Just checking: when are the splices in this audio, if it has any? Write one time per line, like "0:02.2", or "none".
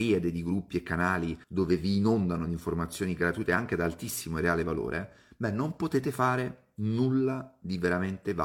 0:01.4